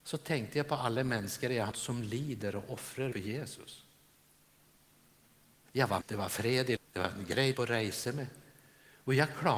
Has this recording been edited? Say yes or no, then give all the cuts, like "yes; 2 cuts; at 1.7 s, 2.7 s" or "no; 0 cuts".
yes; 5 cuts; at 1.7 s, 3.1 s, 6.0 s, 6.8 s, 7.5 s